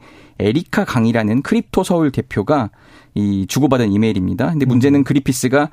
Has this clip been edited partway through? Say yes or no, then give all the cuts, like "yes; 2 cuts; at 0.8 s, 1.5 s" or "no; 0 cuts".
no; 0 cuts